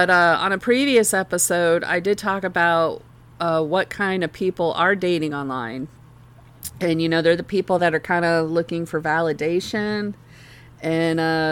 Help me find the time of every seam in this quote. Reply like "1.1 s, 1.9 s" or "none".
none